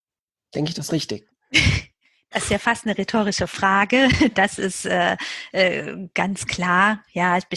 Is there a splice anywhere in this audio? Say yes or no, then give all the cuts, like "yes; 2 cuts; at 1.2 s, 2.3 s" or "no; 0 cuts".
no; 0 cuts